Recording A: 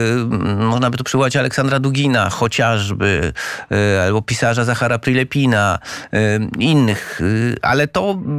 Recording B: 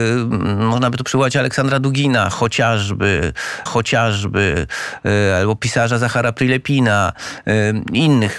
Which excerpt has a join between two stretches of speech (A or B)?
B